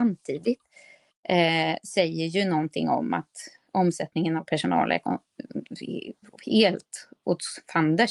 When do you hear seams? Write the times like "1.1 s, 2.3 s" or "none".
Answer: none